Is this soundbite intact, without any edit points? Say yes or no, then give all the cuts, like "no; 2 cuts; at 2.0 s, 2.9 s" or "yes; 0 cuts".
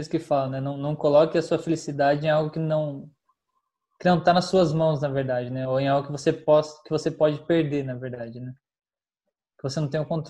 yes; 0 cuts